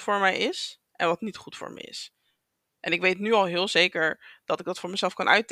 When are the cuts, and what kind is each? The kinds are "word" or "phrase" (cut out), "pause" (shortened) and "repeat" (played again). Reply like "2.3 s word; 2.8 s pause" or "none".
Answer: none